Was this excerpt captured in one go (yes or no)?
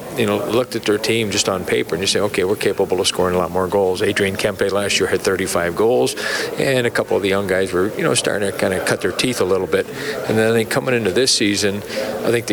yes